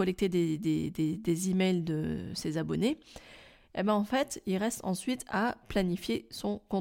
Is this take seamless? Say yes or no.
yes